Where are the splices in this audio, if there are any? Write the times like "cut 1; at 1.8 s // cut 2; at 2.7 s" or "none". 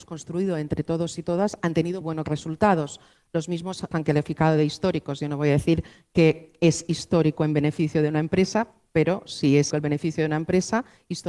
cut 1; at 2.0 s // cut 2; at 3.9 s // cut 3; at 9.7 s

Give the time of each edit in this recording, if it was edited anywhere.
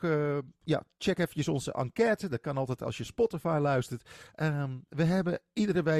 none

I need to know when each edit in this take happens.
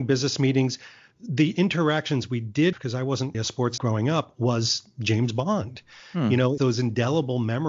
cut 1; at 2.7 s // cut 2; at 3.3 s // cut 3; at 3.8 s // cut 4; at 6.6 s

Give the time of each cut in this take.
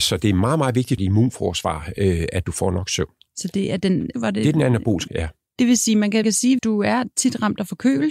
cut 1; at 1.0 s // cut 2; at 4.1 s // cut 3; at 5.1 s // cut 4; at 6.2 s // cut 5; at 6.6 s

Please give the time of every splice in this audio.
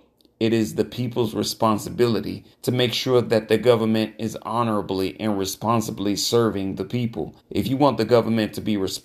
cut 1; at 2.5 s // cut 2; at 7.4 s

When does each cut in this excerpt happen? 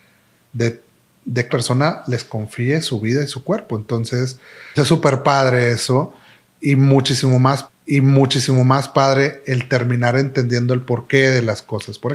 cut 1; at 1.5 s // cut 2; at 4.8 s // cut 3; at 7.7 s

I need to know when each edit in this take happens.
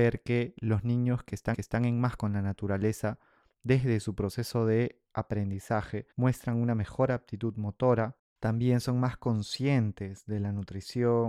cut 1; at 1.5 s // cut 2; at 2.2 s // cut 3; at 6.1 s // cut 4; at 8.3 s

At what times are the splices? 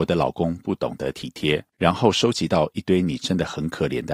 cut 1; at 1.7 s

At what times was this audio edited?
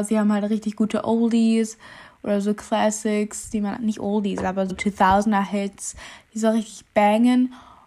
cut 1; at 3.8 s // cut 2; at 4.7 s

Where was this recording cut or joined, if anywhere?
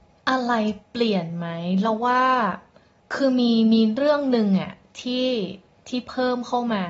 none

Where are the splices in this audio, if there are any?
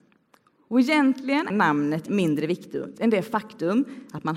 cut 1; at 1.5 s // cut 2; at 2.1 s // cut 3; at 2.9 s

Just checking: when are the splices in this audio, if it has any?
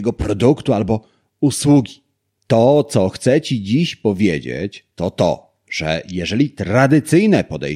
none

